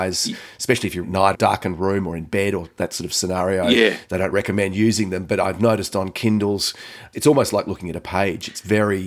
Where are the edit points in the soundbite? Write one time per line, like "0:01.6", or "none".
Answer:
0:01.0
0:01.3
0:04.3